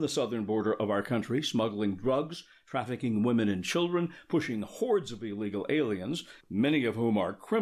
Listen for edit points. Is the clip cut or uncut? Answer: cut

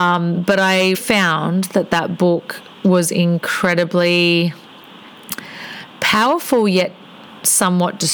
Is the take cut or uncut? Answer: cut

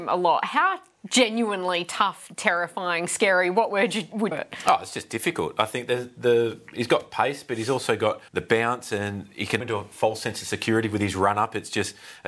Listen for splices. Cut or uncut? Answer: cut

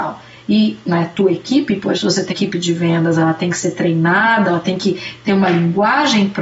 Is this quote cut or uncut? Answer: cut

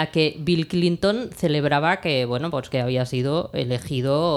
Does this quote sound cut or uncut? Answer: uncut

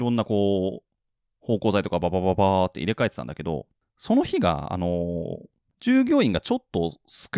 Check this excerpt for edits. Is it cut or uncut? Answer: uncut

